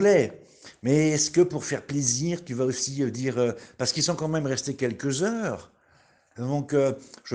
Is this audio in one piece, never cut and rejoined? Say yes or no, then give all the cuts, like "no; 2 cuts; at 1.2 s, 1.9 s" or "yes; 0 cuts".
yes; 0 cuts